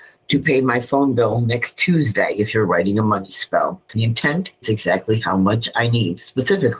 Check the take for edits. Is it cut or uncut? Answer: cut